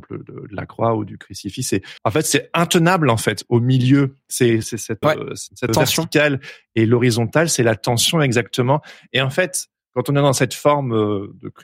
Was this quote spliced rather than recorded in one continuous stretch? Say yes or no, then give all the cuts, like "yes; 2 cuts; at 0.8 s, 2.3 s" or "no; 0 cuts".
yes; 4 cuts; at 2.0 s, 4.6 s, 5.0 s, 5.7 s